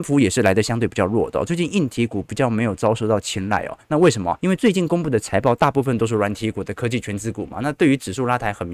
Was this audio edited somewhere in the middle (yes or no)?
yes